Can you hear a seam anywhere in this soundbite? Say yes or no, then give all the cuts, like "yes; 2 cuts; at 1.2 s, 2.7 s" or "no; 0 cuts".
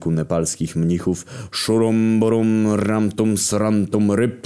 no; 0 cuts